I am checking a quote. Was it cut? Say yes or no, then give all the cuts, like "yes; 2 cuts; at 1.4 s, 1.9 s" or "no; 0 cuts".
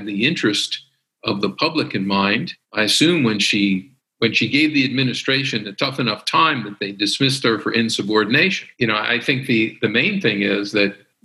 yes; 3 cuts; at 2.6 s, 4.0 s, 8.7 s